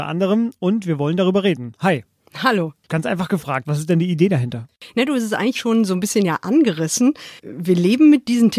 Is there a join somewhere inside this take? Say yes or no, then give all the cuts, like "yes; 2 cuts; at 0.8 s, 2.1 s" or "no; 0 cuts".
yes; 2 cuts; at 5.6 s, 7.4 s